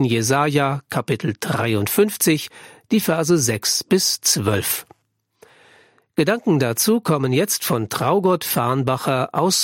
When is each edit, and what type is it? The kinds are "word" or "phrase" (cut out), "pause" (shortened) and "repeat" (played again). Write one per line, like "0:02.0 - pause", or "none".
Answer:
none